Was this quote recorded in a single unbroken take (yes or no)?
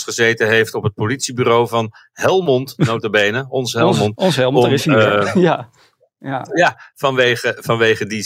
yes